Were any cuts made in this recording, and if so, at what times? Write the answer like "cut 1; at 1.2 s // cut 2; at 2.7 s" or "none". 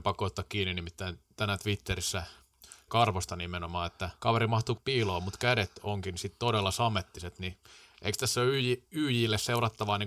cut 1; at 2.9 s // cut 2; at 4.2 s // cut 3; at 4.8 s